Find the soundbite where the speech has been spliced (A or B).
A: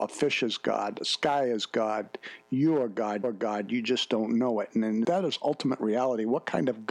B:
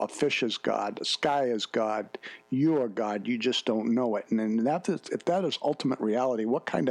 A